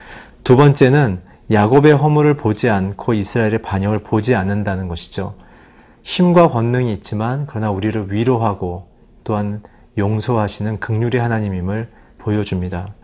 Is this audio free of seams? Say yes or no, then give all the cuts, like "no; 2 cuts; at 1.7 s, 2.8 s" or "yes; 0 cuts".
yes; 0 cuts